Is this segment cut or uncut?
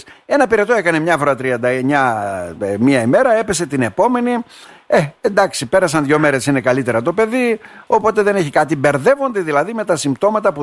uncut